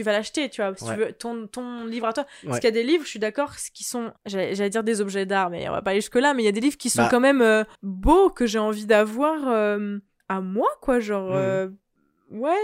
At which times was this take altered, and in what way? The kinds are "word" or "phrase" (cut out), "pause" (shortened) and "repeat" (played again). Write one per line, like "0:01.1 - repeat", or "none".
0:04.2 - pause
0:07.7 - pause
0:10.2 - pause